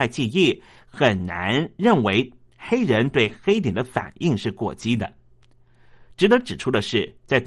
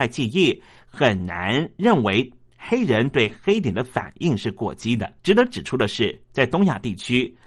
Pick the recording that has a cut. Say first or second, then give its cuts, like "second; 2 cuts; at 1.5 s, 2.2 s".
second; 1 cut; at 5.2 s